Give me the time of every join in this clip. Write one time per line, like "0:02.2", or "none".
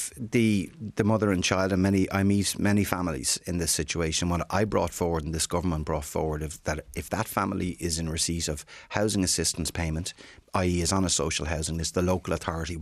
none